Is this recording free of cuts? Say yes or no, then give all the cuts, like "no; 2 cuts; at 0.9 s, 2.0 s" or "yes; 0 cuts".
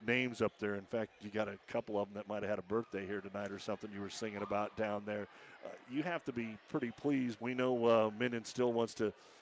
no; 1 cut; at 7.4 s